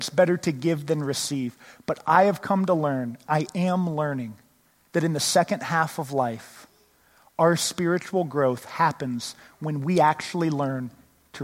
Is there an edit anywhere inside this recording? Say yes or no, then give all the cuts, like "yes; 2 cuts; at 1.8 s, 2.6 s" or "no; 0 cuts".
no; 0 cuts